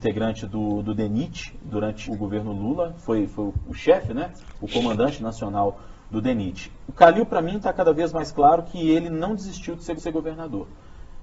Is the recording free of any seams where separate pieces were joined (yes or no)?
no